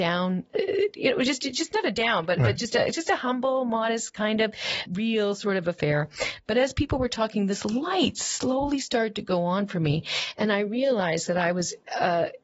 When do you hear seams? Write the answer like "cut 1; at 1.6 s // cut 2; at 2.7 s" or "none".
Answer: cut 1; at 4.9 s